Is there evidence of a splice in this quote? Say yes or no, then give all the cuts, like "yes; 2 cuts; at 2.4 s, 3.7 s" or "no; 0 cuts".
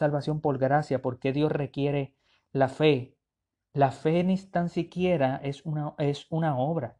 no; 0 cuts